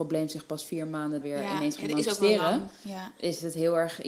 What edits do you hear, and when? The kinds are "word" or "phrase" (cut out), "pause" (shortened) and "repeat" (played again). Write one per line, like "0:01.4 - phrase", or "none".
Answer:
0:01.2 - word